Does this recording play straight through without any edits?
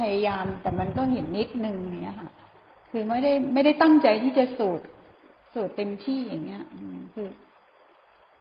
yes; 0 cuts

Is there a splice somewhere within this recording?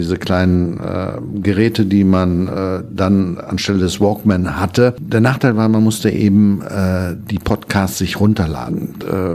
no; 0 cuts

